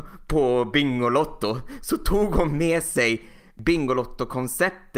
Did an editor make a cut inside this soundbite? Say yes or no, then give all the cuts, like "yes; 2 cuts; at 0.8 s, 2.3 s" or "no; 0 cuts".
no; 0 cuts